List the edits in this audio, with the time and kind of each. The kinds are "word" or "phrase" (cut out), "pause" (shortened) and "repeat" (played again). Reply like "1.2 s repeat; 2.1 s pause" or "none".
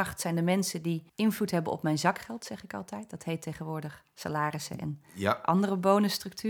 1.1 s pause